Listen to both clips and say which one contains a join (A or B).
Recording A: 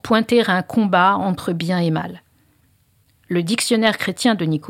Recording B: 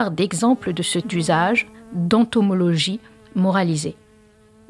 B